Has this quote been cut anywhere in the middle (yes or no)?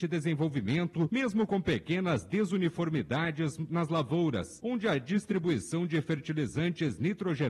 no